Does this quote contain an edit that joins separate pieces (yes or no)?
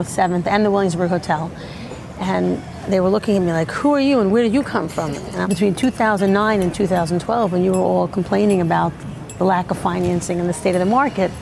yes